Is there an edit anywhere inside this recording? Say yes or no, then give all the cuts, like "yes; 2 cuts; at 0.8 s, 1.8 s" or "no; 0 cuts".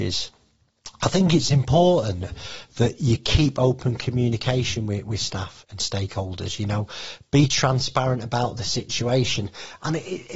yes; 1 cut; at 5.6 s